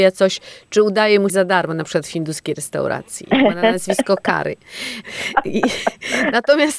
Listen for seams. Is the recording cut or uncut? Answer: cut